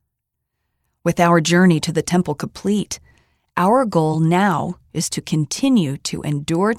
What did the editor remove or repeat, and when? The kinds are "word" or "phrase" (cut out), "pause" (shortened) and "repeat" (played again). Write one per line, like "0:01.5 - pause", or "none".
none